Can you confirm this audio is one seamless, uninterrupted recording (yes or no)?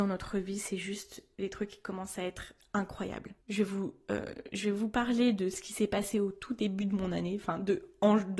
no